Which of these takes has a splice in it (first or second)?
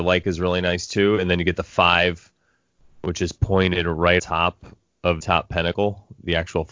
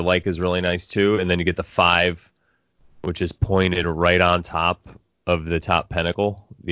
first